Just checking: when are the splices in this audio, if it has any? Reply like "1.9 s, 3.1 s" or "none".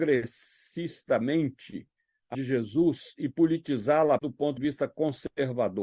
2.3 s, 4.2 s, 4.6 s